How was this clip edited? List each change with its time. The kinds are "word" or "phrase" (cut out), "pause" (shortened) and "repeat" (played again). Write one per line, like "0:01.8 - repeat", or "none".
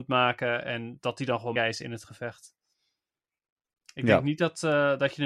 0:01.6 - word